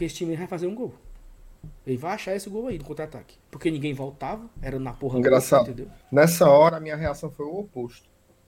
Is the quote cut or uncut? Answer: cut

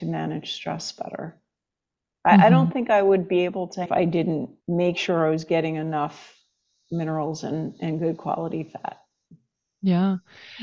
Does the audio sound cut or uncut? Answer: cut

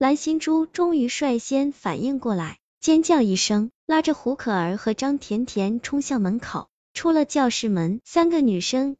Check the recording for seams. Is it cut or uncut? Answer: cut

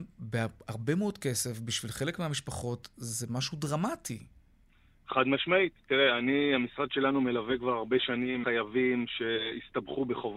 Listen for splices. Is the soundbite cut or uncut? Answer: cut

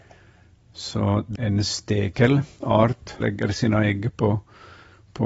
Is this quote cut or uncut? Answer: cut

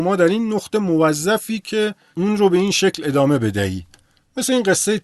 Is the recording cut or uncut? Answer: uncut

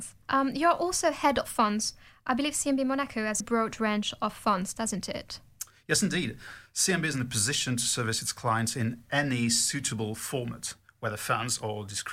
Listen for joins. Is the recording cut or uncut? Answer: cut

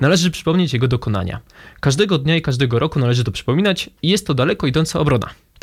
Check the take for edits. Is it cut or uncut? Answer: uncut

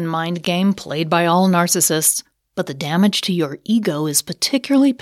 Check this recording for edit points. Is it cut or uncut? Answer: uncut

